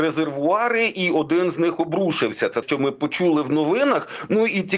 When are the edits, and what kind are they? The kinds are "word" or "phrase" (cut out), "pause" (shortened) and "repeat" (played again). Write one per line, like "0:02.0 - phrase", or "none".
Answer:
0:02.6 - word